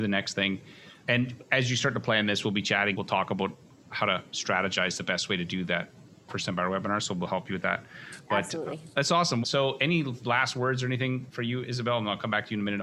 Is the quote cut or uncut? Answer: uncut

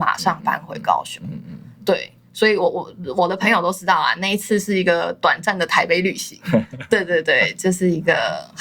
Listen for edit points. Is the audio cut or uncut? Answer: uncut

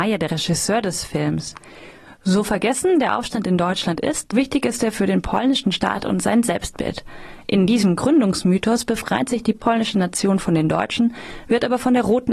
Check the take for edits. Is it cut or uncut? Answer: cut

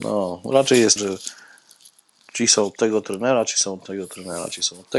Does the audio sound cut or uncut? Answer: cut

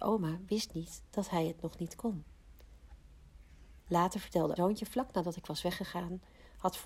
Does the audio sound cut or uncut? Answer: cut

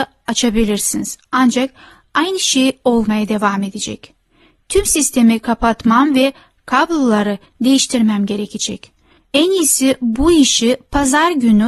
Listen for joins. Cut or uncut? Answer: uncut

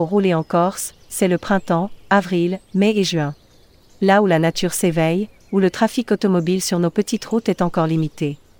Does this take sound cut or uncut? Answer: uncut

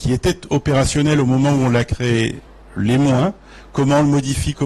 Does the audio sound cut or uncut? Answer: uncut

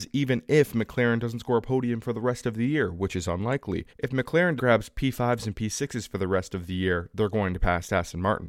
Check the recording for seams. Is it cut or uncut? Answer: cut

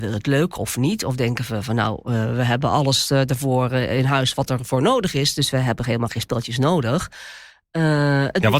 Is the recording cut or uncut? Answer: uncut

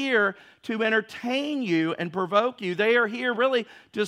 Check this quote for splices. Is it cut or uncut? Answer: uncut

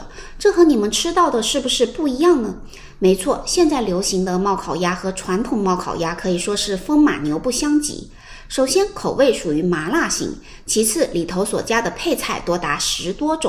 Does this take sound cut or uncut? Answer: uncut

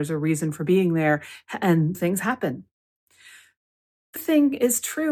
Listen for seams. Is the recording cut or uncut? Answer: cut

